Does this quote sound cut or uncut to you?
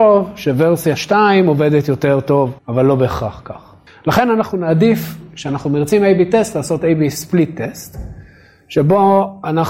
cut